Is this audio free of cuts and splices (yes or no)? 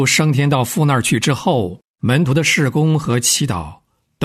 no